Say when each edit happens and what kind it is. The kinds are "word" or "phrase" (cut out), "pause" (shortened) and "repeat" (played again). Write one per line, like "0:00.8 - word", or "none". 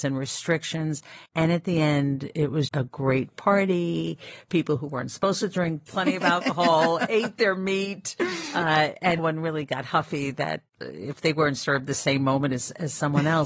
0:01.3 - pause
0:02.7 - word
0:05.9 - word
0:09.2 - word
0:10.7 - pause